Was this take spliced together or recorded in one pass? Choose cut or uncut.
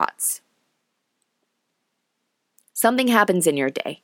uncut